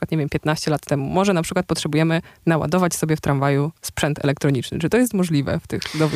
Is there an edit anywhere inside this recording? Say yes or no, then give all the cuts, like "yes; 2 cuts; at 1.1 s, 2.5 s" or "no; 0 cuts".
no; 0 cuts